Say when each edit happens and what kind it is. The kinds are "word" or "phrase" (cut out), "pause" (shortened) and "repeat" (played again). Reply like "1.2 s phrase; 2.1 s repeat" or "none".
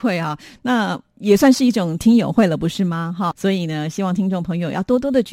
3.3 s word

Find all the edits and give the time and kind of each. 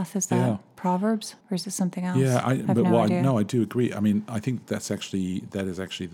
1.4 s pause

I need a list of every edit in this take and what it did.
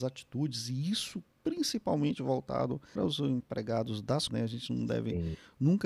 3.0 s phrase; 4.3 s word

